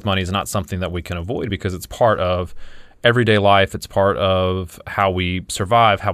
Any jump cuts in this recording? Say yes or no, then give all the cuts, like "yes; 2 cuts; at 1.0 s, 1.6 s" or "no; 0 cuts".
no; 0 cuts